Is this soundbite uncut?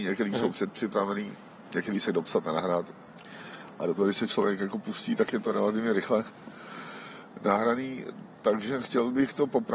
no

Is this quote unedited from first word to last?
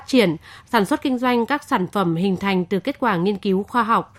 yes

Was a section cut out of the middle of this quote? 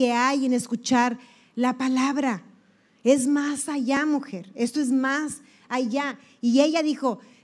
no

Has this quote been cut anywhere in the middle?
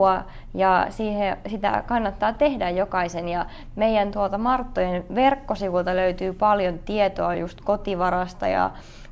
no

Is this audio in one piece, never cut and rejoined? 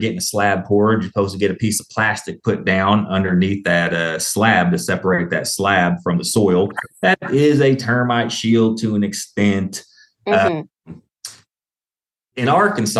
yes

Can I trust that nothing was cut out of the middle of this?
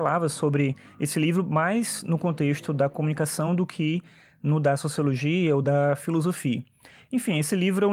yes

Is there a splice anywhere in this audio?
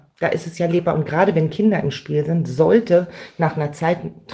no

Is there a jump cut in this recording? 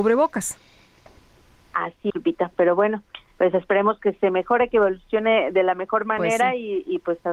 yes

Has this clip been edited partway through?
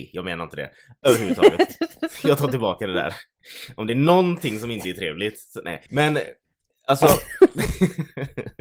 yes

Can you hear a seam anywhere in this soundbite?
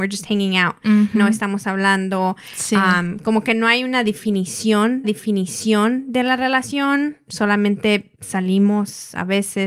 yes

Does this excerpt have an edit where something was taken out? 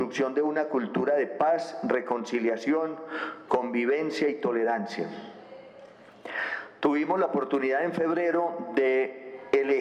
no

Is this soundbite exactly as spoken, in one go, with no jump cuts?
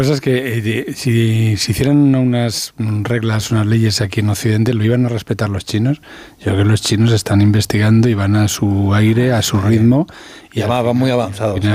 yes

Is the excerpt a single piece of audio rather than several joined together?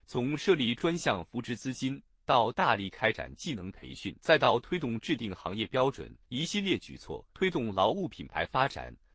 no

